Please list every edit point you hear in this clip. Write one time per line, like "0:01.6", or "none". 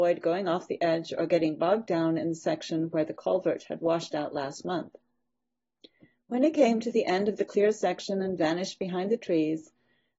none